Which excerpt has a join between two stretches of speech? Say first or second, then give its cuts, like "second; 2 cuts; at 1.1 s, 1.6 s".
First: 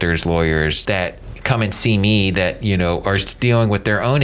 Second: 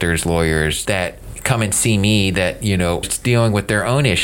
second; 1 cut; at 3.0 s